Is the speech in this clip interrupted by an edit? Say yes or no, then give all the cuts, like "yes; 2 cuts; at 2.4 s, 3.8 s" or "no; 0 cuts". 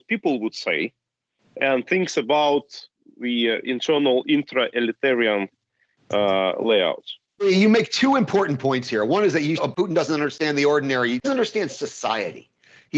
yes; 3 cuts; at 9.6 s, 11.2 s, 11.7 s